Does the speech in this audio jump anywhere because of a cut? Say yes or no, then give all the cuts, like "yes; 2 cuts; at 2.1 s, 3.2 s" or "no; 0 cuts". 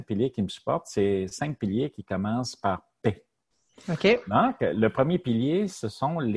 no; 0 cuts